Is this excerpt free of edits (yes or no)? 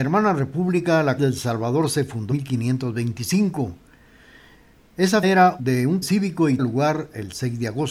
no